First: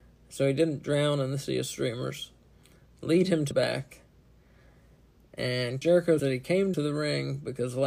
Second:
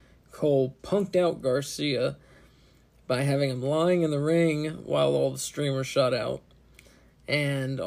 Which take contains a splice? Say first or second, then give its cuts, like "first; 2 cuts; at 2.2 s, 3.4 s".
first; 4 cuts; at 3.5 s, 5.8 s, 6.2 s, 6.7 s